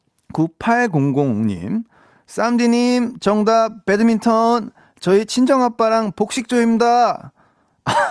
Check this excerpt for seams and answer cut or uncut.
uncut